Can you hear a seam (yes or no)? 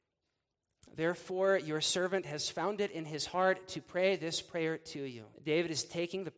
yes